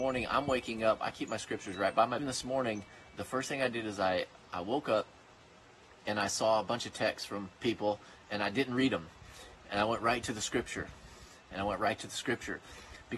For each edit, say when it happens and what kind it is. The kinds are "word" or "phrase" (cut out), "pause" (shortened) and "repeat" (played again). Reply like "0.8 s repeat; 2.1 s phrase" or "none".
2.2 s phrase; 7.5 s pause